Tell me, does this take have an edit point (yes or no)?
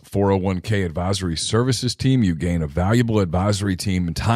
no